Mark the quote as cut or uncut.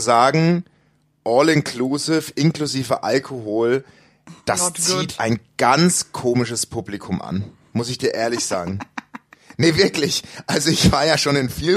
cut